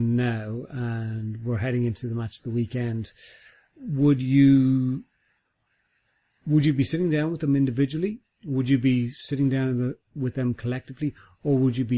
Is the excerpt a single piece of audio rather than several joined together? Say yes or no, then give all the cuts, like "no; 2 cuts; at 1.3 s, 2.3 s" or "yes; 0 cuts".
yes; 0 cuts